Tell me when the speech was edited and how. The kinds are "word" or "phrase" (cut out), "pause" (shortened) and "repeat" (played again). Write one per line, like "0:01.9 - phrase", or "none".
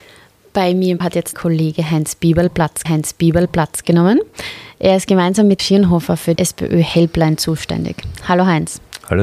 0:01.0 - word
0:01.3 - word
0:02.9 - repeat
0:05.6 - word
0:06.4 - word